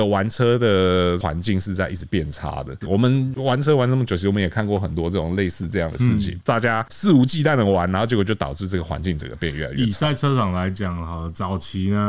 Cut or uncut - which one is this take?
cut